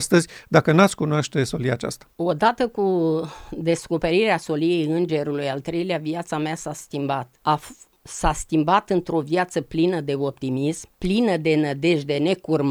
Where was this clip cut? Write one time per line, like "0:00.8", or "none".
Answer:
0:02.1
0:07.4
0:08.0
0:10.9